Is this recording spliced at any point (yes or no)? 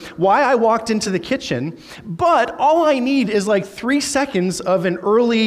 no